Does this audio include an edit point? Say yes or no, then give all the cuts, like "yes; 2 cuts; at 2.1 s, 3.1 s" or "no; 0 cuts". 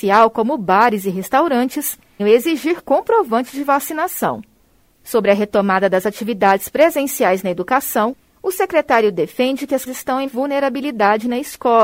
yes; 3 cuts; at 2.2 s, 9.9 s, 10.3 s